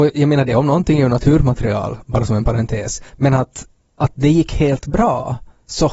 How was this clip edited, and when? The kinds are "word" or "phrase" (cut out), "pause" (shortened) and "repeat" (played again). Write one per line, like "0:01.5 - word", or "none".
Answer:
0:03.1 - pause
0:03.8 - pause